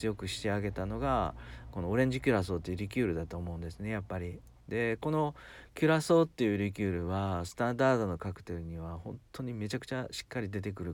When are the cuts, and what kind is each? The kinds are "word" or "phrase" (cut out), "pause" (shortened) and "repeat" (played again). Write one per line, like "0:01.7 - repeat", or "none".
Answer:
0:04.6 - pause